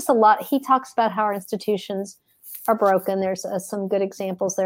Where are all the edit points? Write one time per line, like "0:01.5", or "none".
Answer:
none